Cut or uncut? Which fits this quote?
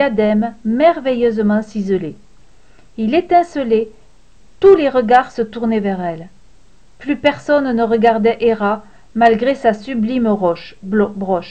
uncut